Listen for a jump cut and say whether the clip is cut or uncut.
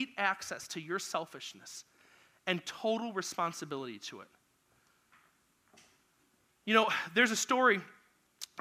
uncut